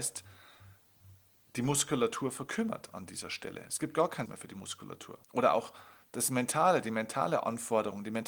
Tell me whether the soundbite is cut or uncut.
cut